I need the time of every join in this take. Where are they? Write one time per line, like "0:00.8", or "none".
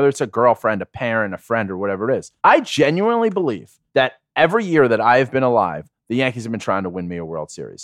0:02.4
0:03.9